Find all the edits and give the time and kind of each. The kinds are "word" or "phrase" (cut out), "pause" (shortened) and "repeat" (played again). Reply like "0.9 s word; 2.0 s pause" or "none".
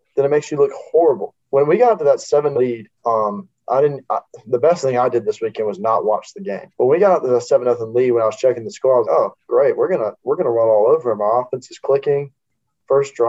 1.4 s pause; 2.5 s word; 2.9 s pause; 6.7 s pause; 9.0 s word; 10.2 s word